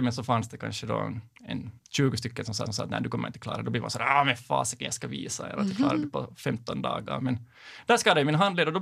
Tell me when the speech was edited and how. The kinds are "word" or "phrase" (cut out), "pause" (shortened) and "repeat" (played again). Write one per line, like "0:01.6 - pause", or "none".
0:01.8 - pause
0:02.7 - repeat

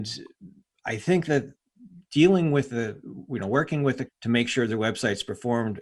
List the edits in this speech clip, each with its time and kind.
0:04.1 - word

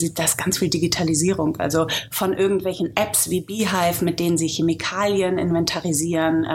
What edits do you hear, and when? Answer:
none

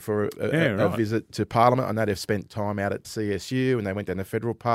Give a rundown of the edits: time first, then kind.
0:01.3 - word
0:03.0 - word

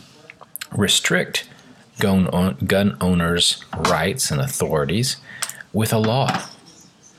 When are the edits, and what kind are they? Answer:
none

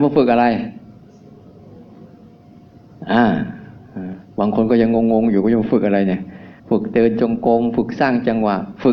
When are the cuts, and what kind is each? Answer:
0:06.6 - pause

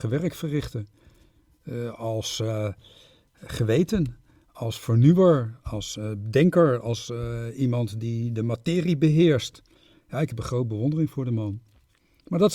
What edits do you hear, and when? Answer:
none

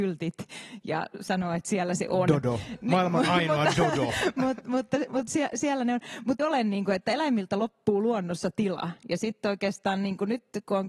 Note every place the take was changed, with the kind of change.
0:06.4 - word

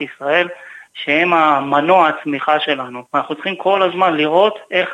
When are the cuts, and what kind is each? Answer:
0:03.1 - pause

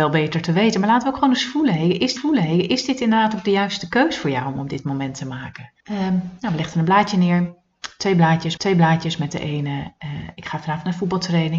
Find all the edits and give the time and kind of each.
0:02.2 - repeat
0:05.8 - pause
0:08.6 - repeat

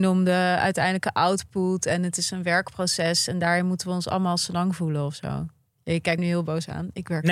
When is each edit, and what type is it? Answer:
0:05.7 - pause
0:06.2 - word

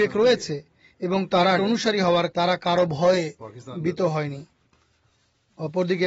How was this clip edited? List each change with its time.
0:01.6 - word
0:02.3 - word

